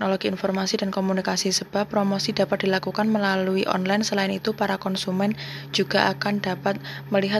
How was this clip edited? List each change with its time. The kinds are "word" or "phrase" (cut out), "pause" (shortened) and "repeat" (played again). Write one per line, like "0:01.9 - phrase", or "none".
none